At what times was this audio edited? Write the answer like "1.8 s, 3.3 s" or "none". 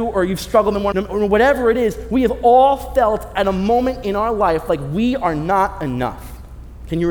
0.9 s